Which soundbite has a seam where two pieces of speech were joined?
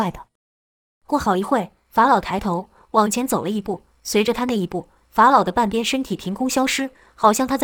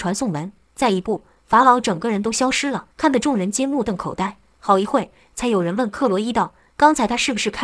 second; 1 cut; at 2.9 s

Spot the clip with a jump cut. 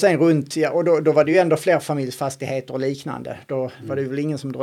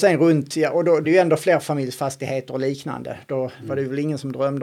second; 1 cut; at 1.0 s

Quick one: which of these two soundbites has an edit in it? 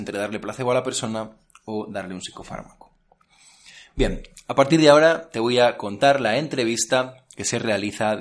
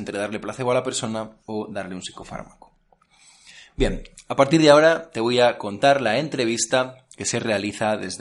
second; 1 cut; at 1.4 s

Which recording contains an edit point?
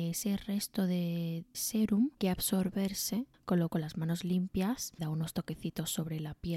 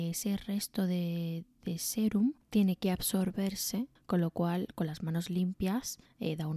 first; 4 cuts; at 1.5 s, 2.2 s, 3.7 s, 5.0 s

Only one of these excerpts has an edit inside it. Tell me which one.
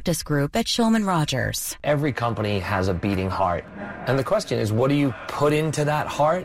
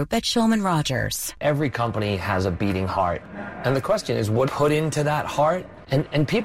second; 1 cut; at 4.5 s

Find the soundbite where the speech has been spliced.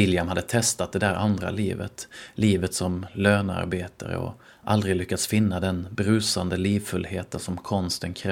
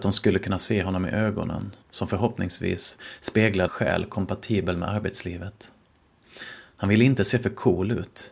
second; 2 cuts; at 1.8 s, 3.7 s

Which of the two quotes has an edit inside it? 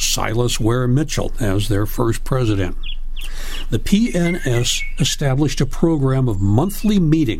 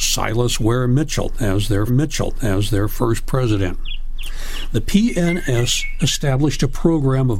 second; 1 cut; at 1.9 s

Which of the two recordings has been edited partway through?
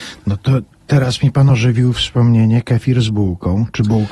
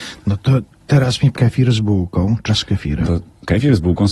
second; 3 cuts; at 1.3 s, 2.5 s, 3.0 s

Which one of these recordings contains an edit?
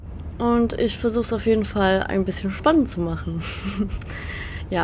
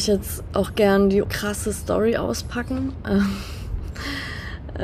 second; 1 cut; at 1.2 s

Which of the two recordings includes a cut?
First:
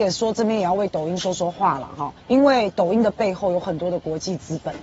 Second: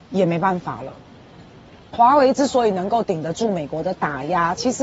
first; 1 cut; at 2.2 s

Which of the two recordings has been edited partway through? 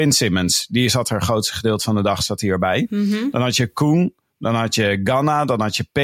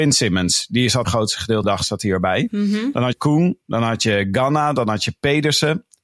second; 4 cuts; at 1.0 s, 1.6 s, 3.1 s, 3.6 s

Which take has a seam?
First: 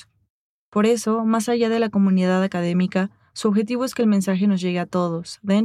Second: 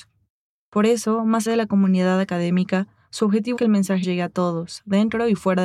second; 3 cuts; at 1.5 s, 3.6 s, 4.0 s

